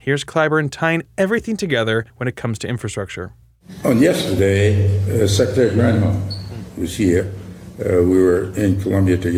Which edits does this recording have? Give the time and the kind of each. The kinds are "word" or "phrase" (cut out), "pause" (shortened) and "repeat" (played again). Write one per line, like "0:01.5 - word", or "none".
0:02.1 - pause